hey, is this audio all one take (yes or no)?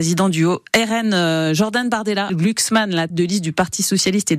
no